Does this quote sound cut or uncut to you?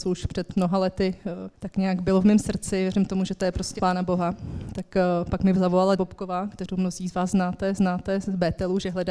cut